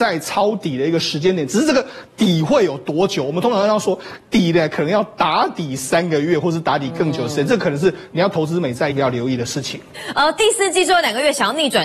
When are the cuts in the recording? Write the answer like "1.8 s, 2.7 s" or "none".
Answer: 8.9 s